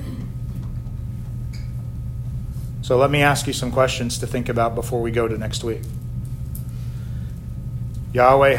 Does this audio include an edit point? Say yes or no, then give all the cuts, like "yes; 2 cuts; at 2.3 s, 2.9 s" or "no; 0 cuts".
no; 0 cuts